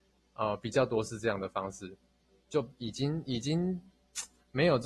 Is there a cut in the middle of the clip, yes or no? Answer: no